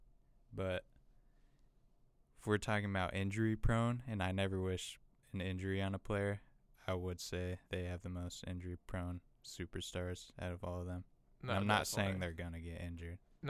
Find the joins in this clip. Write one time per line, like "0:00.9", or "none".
0:07.6